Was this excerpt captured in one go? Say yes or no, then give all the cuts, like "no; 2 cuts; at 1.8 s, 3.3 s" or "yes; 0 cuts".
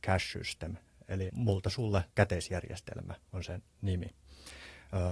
no; 2 cuts; at 1.3 s, 2.1 s